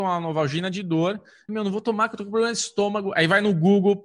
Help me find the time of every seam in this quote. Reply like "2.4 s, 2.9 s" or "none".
1.5 s